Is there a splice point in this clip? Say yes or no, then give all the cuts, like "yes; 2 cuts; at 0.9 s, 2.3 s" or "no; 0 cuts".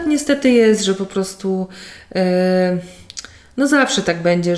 no; 0 cuts